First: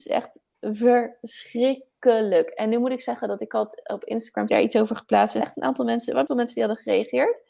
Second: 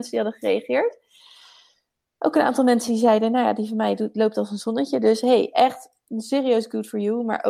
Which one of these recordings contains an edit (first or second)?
first